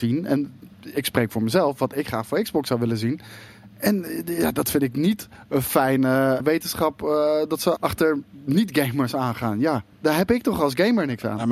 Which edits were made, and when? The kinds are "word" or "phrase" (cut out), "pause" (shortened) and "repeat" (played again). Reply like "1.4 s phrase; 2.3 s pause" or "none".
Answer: 6.4 s word; 7.8 s word; 9.9 s pause